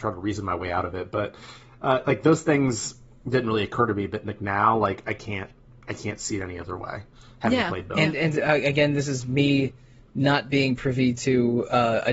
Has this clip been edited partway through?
no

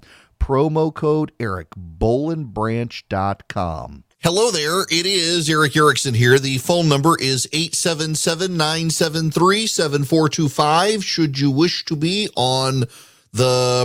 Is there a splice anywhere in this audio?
no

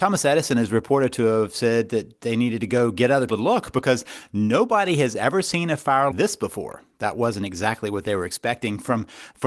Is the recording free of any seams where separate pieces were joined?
no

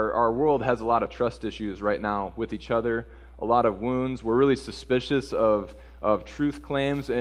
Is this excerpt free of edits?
yes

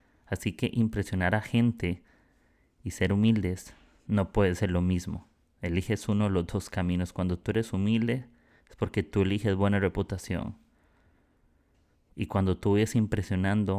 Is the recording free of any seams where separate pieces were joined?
yes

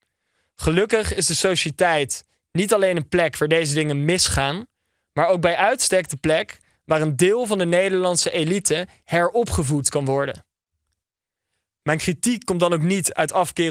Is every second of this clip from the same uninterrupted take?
yes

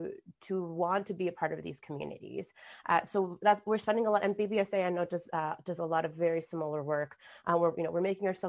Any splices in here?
no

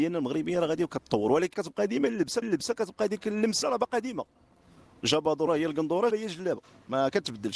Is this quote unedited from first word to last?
no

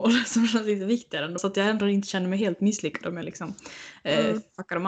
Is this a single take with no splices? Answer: no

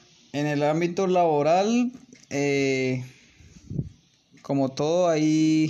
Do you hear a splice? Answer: no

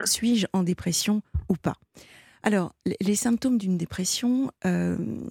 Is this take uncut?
yes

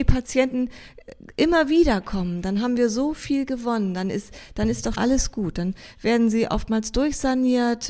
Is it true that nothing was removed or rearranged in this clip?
no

